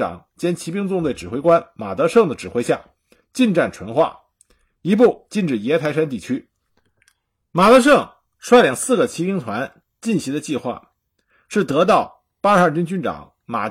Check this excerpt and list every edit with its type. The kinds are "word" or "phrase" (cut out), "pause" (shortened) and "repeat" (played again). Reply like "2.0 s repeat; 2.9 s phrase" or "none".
none